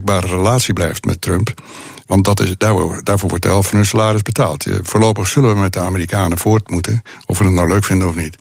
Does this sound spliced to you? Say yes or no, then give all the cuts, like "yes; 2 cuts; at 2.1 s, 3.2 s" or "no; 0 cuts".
no; 0 cuts